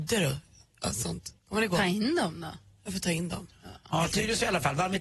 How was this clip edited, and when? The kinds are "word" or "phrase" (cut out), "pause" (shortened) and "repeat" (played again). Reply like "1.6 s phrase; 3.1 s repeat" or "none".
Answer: 1.4 s pause